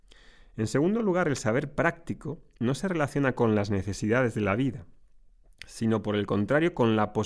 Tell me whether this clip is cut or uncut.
uncut